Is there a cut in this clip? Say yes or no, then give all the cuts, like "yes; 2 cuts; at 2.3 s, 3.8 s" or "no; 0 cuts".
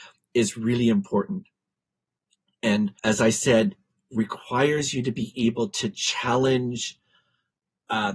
yes; 1 cut; at 3.0 s